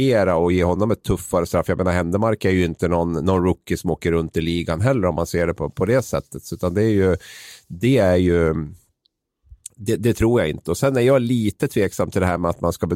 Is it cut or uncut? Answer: uncut